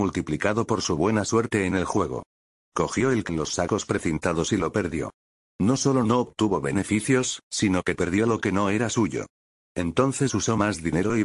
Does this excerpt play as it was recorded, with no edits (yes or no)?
no